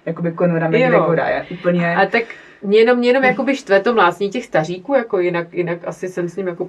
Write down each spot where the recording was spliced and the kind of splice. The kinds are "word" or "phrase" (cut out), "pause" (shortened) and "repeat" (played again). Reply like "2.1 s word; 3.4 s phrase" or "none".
none